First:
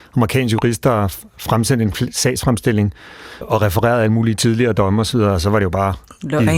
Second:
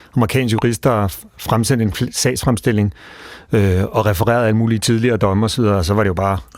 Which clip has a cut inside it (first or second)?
first